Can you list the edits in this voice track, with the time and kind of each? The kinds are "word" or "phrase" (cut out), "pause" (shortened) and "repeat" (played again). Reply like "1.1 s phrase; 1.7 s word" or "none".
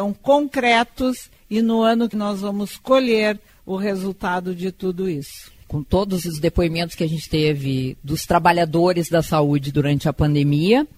2.1 s word